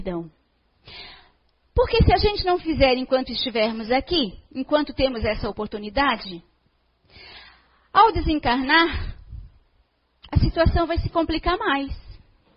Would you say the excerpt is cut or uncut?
uncut